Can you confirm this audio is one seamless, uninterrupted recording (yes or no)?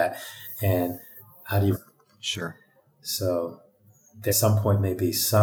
no